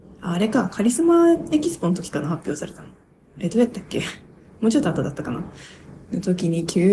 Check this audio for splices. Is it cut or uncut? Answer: uncut